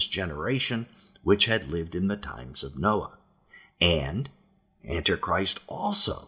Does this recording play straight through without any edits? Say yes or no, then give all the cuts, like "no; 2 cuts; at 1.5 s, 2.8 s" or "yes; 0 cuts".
yes; 0 cuts